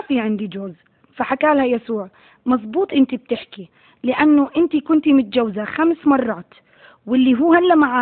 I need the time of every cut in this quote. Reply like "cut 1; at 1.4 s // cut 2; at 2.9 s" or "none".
none